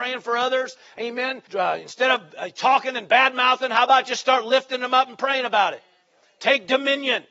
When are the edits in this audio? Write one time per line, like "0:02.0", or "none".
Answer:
0:01.5